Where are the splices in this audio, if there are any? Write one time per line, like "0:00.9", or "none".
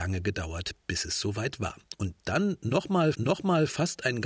0:03.1